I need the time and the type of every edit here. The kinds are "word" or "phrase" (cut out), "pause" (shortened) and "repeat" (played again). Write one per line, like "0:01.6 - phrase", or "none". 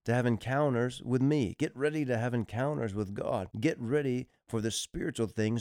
0:03.5 - pause